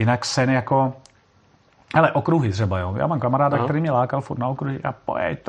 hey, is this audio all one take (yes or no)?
yes